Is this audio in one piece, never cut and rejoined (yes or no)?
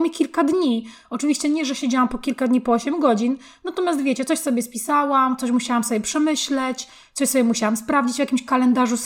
yes